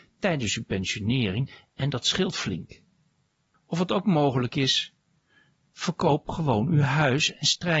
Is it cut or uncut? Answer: uncut